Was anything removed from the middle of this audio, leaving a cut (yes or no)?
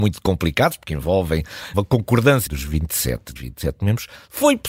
yes